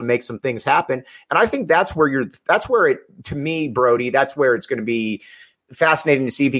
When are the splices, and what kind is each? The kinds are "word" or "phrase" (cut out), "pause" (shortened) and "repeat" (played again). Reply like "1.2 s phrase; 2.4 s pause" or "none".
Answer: none